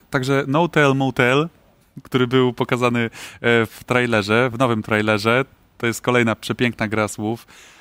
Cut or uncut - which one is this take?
uncut